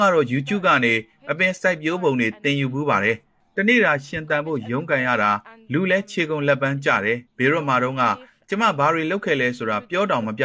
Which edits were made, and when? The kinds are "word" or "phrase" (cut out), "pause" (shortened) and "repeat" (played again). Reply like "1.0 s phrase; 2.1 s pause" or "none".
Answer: 7.3 s pause